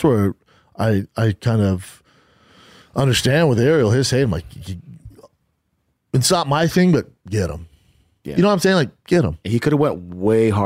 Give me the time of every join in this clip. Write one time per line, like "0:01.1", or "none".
none